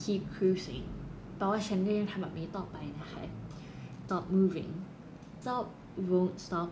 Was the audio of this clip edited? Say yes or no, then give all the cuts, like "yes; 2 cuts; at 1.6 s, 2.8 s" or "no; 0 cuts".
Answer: yes; 2 cuts; at 4.1 s, 5.4 s